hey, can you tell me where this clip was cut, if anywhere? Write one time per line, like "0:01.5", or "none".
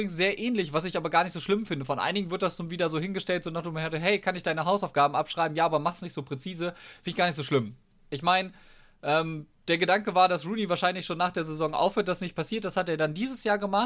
none

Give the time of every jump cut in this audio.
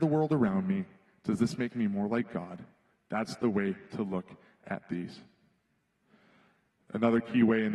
none

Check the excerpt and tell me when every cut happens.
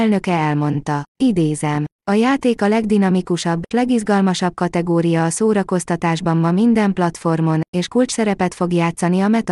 0:01.1
0:03.7

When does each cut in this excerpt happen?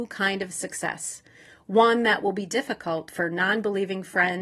none

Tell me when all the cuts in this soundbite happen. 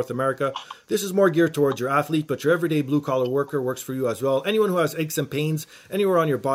none

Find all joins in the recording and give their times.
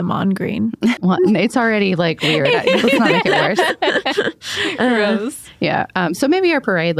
0:01.0

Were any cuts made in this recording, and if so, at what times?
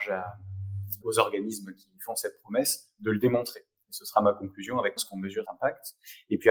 0:01.0
0:05.0
0:05.4

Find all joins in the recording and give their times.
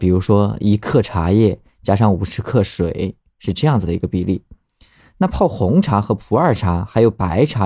none

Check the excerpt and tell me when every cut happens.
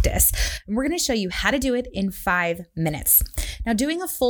none

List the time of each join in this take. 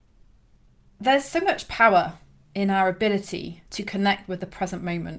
0:02.4
0:03.7

